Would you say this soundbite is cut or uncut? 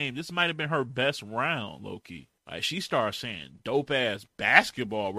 cut